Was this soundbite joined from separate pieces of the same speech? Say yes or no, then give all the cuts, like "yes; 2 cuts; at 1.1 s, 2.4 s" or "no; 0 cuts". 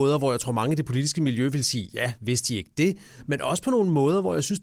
no; 0 cuts